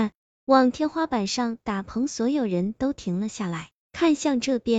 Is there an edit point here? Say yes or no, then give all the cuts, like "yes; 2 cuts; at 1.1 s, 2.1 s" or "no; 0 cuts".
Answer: no; 0 cuts